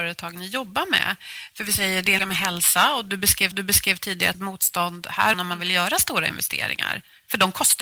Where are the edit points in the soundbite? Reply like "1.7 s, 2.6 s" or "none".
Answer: 2.2 s, 3.5 s, 4.3 s, 5.3 s